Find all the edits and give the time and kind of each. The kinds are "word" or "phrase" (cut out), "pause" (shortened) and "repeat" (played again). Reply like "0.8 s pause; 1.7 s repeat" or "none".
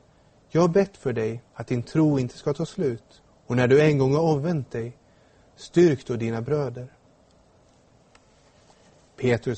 1.5 s pause; 3.3 s pause